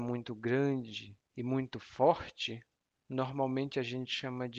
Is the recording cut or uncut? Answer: cut